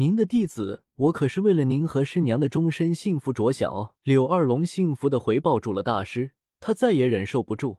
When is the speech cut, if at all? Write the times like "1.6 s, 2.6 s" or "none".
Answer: 4.0 s, 6.5 s